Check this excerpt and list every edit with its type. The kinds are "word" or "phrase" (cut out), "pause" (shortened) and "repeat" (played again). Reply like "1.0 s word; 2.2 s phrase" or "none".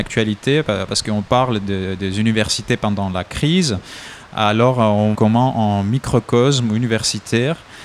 5.1 s word